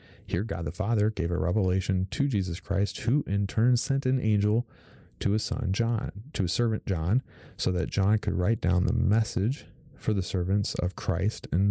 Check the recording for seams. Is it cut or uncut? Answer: uncut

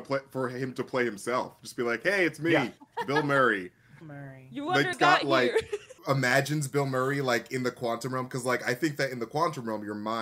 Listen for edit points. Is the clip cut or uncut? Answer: cut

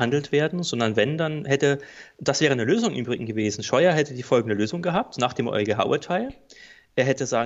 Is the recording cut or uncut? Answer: uncut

